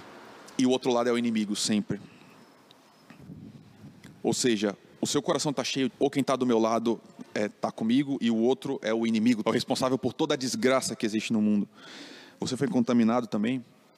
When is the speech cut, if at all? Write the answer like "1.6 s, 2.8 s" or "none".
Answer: 5.9 s, 9.4 s

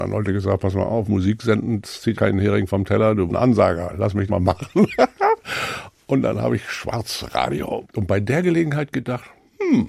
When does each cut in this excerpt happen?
1.1 s, 1.8 s, 2.1 s, 3.3 s, 4.3 s, 7.8 s

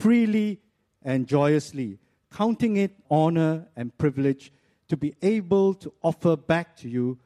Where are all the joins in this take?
3.0 s

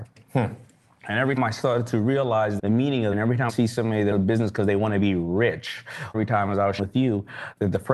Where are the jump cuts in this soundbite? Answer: 1.4 s, 2.6 s, 3.1 s, 3.5 s, 4.1 s, 6.1 s, 6.8 s

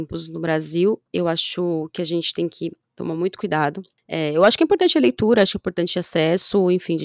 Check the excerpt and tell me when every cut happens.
1.1 s

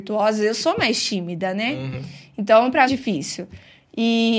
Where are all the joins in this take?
2.9 s

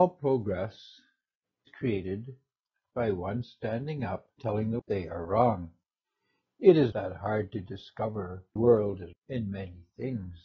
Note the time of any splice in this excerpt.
1.7 s, 3.4 s, 4.4 s, 4.8 s, 6.9 s, 8.6 s, 9.1 s

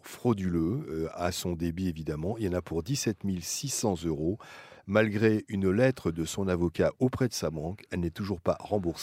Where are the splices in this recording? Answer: none

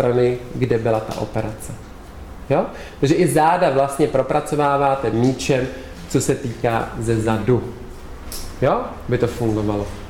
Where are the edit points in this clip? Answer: none

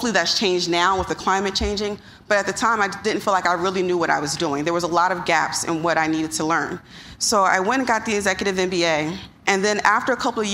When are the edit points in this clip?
none

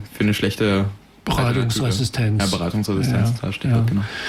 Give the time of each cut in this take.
none

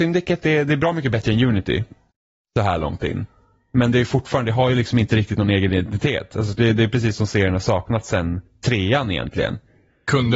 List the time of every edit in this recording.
2.1 s

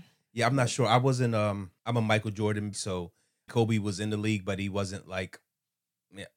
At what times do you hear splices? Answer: 1.8 s, 2.7 s, 3.5 s

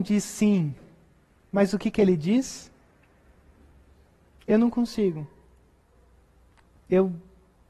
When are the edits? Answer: none

